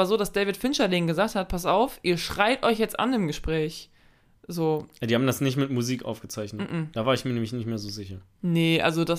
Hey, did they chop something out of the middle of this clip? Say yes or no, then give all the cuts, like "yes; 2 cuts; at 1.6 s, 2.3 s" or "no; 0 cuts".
no; 0 cuts